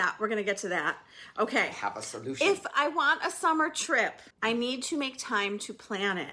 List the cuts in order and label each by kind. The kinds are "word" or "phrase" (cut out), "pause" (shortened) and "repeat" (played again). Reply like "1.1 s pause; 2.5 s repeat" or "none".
4.3 s pause